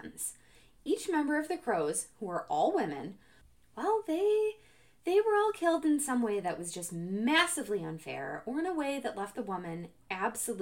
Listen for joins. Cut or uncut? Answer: uncut